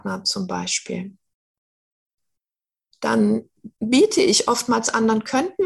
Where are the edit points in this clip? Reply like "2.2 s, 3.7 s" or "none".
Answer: 3.7 s